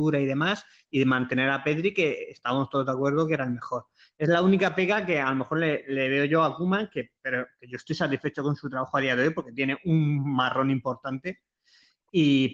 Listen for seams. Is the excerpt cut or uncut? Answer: uncut